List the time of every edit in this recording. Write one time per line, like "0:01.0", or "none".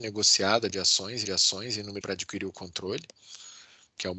0:01.2
0:02.0